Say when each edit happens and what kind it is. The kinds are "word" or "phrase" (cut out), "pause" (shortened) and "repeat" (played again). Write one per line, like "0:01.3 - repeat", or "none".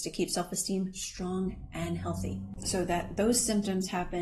none